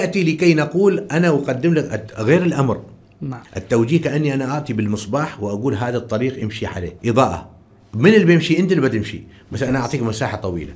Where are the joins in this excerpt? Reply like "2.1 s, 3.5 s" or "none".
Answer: 3.5 s, 7.0 s